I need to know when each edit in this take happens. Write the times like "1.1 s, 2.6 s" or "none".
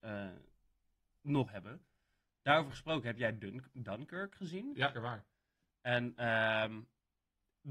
1.5 s, 4.9 s